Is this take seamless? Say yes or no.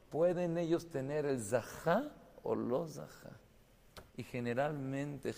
no